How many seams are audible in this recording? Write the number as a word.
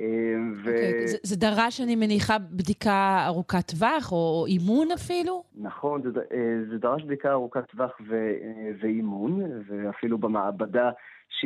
one